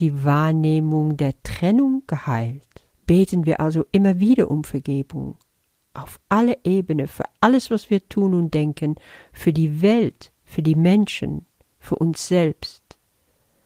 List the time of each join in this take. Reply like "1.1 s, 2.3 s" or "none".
2.9 s